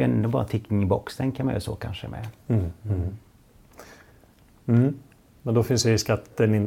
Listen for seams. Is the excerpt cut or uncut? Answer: uncut